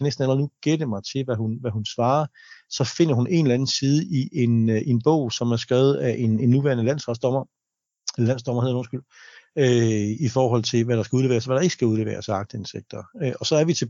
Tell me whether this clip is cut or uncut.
uncut